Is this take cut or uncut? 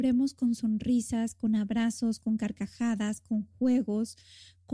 uncut